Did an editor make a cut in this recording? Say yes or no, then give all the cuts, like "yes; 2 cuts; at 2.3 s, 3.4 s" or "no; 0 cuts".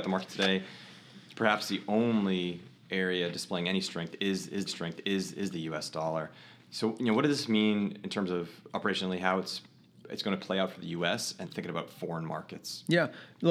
yes; 3 cuts; at 4.7 s, 8.7 s, 11.4 s